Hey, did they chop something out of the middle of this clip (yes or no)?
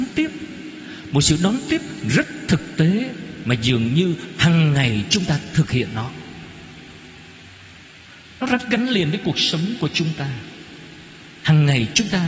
no